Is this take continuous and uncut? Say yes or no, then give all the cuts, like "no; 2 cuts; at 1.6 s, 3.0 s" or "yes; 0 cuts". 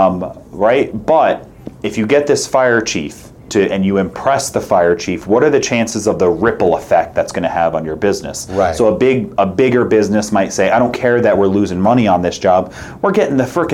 no; 2 cuts; at 1.7 s, 3.4 s